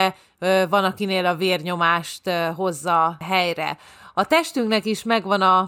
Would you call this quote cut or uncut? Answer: uncut